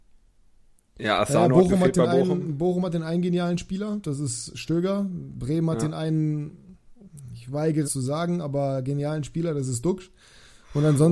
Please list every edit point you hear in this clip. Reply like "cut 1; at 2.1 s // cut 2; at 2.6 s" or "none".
cut 1; at 7.8 s